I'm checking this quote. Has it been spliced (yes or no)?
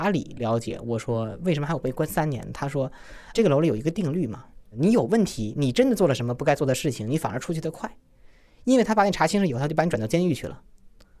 yes